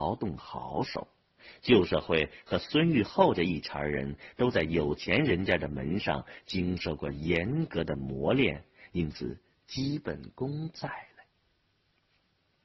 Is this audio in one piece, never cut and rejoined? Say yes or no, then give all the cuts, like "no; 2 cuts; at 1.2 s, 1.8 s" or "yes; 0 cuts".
yes; 0 cuts